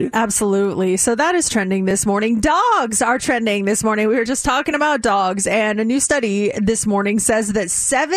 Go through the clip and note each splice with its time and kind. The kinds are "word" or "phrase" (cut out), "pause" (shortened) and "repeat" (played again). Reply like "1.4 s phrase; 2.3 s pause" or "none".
none